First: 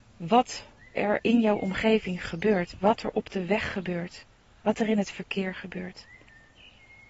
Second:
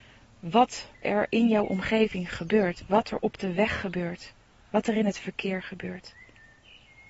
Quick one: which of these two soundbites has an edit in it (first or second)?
second